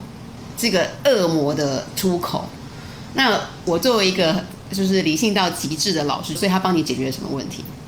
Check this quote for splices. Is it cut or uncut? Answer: cut